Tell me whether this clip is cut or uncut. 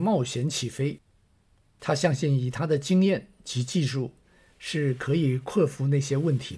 uncut